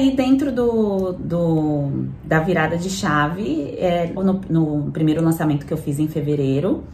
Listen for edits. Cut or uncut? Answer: cut